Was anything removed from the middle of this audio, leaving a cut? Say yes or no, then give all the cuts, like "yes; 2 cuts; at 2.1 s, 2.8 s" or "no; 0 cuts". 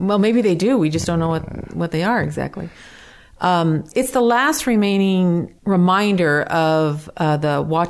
yes; 1 cut; at 5.6 s